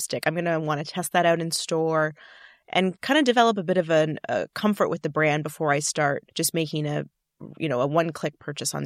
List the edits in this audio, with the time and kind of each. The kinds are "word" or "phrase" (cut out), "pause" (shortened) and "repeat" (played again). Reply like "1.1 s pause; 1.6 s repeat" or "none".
6.3 s pause